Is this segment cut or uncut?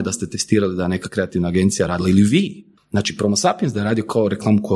uncut